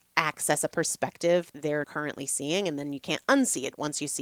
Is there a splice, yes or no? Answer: yes